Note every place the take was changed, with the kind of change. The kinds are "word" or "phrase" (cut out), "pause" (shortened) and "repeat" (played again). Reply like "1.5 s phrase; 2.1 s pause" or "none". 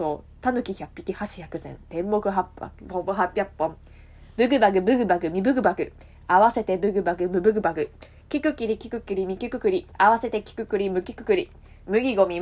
9.9 s pause